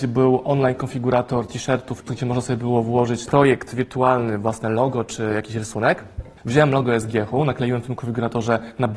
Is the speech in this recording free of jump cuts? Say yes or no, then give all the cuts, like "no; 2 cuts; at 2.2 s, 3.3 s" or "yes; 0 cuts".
no; 3 cuts; at 2.1 s, 3.3 s, 6.4 s